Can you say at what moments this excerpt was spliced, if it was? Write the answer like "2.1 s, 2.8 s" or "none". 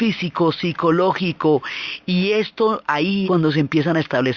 3.2 s